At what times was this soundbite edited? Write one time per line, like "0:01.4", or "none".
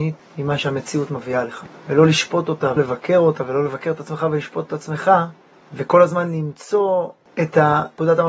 0:02.8